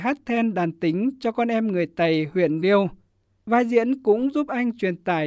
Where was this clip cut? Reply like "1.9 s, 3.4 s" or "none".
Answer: 2.6 s